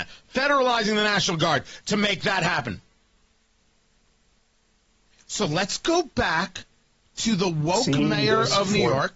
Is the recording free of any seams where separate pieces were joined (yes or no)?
yes